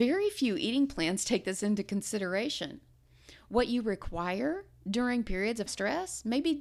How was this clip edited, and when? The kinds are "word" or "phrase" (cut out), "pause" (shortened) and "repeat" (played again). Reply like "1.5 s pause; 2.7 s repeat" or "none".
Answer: 5.7 s word